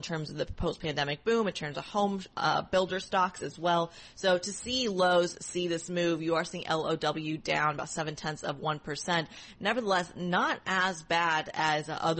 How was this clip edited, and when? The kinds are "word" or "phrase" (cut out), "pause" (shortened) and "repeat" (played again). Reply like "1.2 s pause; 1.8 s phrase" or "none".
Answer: none